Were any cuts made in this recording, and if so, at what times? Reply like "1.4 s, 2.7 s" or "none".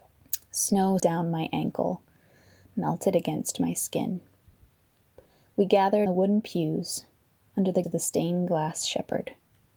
1.0 s, 6.1 s, 7.8 s